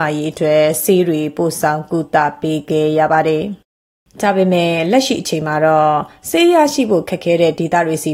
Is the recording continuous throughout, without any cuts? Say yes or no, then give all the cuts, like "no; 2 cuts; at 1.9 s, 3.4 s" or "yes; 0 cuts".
no; 1 cut; at 3.6 s